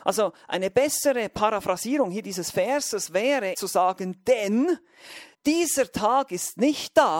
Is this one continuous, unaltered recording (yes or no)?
no